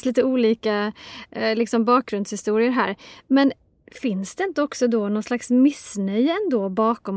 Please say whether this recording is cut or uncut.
uncut